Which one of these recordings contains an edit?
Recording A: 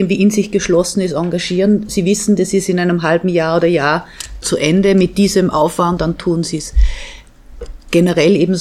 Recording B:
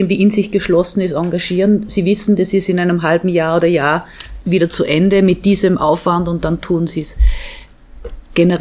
A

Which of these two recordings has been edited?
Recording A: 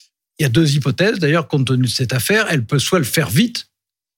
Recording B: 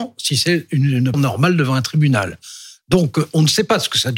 B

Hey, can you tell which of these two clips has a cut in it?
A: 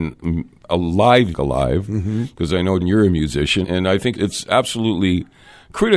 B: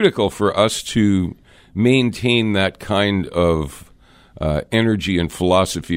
A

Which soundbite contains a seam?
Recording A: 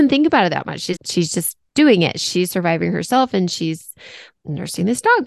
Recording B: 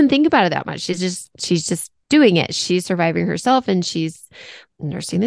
A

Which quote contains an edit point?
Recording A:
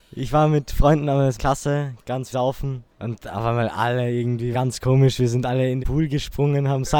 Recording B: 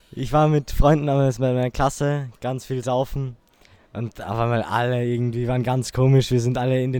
A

